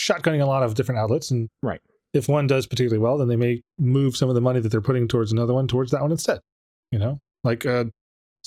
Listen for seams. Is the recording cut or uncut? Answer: uncut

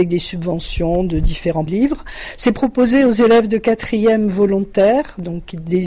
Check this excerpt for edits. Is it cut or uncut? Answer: cut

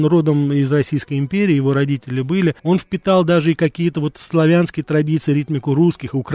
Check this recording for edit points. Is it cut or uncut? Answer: cut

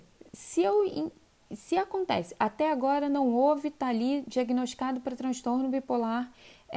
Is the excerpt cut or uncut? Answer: uncut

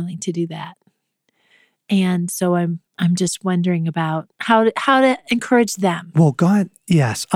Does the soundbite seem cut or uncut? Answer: cut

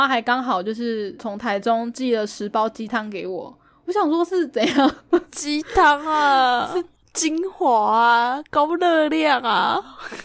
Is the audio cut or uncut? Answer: uncut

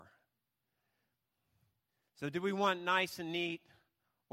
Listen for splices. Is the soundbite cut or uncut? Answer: uncut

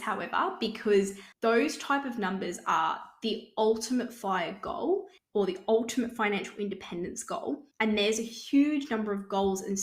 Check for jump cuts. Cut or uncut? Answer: cut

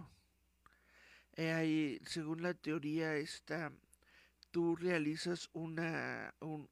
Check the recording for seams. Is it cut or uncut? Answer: uncut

